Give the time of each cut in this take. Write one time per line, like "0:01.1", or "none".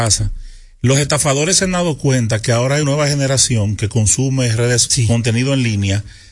0:02.8
0:04.9